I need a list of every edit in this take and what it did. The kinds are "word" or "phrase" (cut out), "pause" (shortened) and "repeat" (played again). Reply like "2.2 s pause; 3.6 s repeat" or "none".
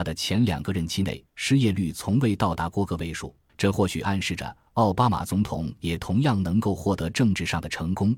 1.3 s pause; 3.5 s pause